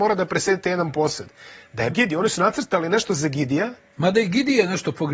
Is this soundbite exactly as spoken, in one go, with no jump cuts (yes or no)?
no